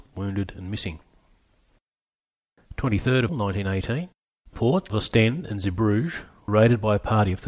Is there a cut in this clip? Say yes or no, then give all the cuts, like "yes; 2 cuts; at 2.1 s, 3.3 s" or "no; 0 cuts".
yes; 4 cuts; at 3.3 s, 4.5 s, 4.9 s, 6.5 s